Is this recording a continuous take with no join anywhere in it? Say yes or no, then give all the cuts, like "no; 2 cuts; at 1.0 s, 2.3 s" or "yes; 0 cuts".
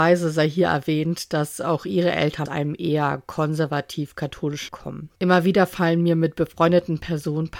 no; 3 cuts; at 2.5 s, 4.7 s, 5.2 s